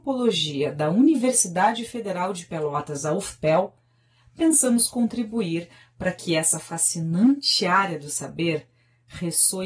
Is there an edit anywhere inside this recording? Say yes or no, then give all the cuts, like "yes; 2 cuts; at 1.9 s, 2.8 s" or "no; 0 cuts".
no; 0 cuts